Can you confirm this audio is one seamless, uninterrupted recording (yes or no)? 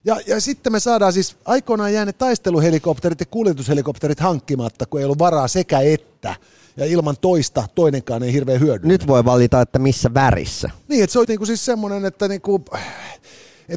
no